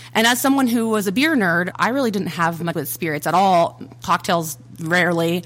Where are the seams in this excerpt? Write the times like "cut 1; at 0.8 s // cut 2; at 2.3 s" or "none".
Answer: cut 1; at 1.7 s // cut 2; at 2.7 s